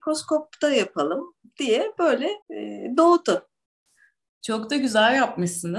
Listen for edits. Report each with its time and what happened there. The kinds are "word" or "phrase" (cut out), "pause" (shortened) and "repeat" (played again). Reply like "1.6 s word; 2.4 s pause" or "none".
2.4 s pause